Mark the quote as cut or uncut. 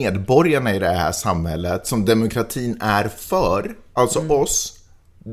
uncut